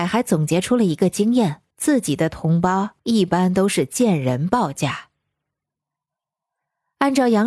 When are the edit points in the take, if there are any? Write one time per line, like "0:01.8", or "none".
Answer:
0:01.7
0:03.0